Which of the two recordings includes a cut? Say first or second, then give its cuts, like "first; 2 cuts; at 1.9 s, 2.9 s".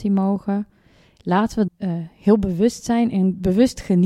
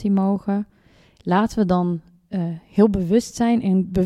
first; 1 cut; at 1.7 s